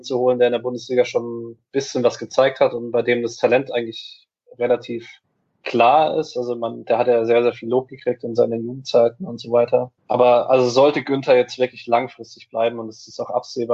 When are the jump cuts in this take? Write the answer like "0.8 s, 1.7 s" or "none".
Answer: 1.6 s, 5.2 s, 10.0 s

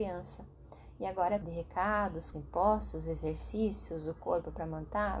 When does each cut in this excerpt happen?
1.4 s, 2.3 s

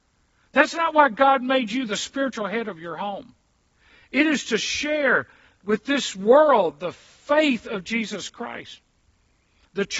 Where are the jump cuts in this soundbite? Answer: none

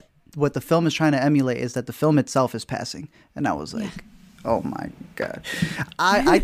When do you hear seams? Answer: none

